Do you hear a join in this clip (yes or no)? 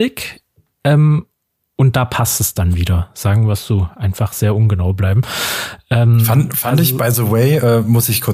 no